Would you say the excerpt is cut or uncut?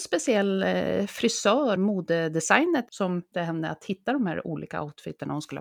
cut